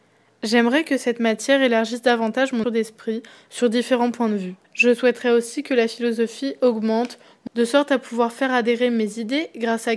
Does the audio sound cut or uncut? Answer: cut